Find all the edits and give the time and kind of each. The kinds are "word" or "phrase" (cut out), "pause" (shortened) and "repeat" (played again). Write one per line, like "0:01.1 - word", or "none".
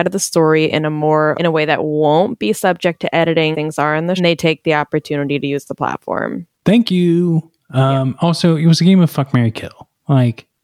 0:01.4 - phrase
0:03.5 - word
0:04.2 - phrase
0:06.5 - pause